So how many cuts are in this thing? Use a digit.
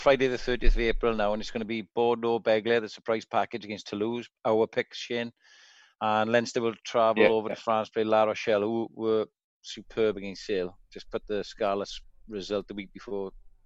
0